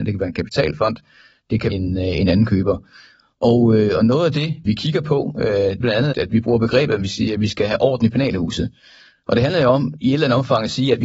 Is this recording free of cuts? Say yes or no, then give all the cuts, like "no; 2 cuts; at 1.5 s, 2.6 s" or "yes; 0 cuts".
no; 4 cuts; at 1.7 s, 4.7 s, 5.8 s, 6.1 s